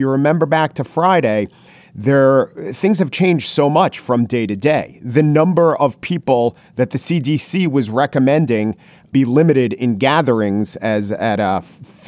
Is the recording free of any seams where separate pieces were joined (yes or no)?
yes